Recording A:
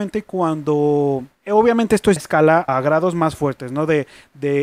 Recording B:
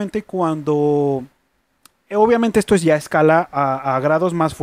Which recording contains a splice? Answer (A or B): A